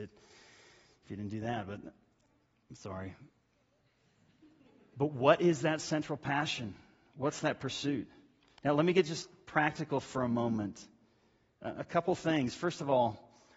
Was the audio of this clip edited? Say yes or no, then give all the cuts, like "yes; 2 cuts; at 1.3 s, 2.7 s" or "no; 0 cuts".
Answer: no; 0 cuts